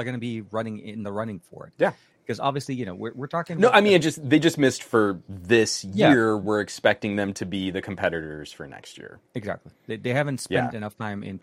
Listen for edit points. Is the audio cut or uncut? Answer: cut